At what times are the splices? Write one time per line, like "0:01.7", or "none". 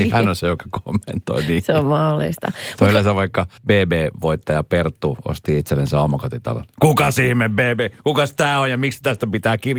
0:03.6